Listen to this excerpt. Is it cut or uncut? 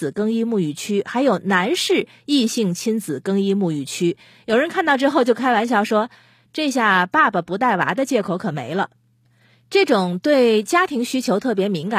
uncut